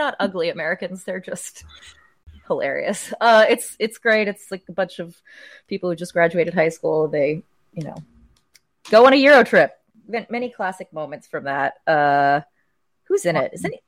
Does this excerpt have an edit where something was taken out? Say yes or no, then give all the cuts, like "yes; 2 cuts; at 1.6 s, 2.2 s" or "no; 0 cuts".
no; 0 cuts